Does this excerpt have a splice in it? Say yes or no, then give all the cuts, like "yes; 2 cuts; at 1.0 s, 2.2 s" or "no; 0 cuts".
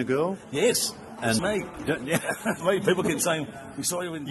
yes; 2 cuts; at 1.4 s, 2.6 s